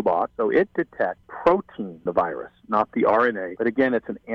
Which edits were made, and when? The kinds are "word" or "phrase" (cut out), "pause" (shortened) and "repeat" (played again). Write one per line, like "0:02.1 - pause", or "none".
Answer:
0:01.2 - word
0:02.1 - word